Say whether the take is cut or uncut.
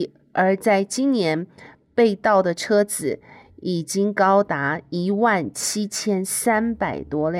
uncut